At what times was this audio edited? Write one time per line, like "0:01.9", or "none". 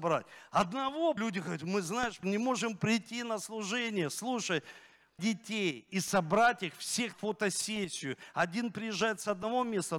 0:01.2
0:02.2
0:05.2
0:07.1